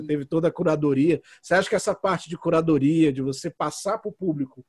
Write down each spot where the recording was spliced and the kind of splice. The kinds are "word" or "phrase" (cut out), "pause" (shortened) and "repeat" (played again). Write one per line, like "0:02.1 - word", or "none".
none